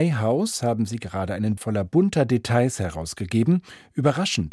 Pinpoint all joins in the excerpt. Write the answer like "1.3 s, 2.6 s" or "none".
1.6 s